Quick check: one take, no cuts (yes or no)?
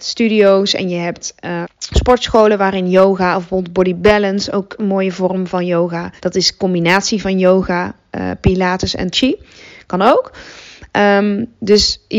no